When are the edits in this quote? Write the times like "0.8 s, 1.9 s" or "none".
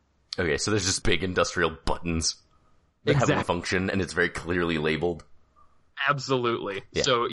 1.0 s, 3.4 s